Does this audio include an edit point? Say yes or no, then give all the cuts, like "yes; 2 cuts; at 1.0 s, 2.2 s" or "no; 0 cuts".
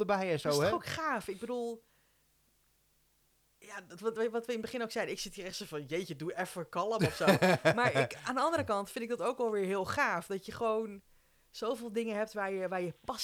no; 0 cuts